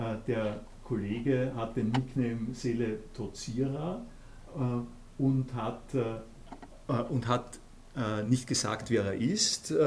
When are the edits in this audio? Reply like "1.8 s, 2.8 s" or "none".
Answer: none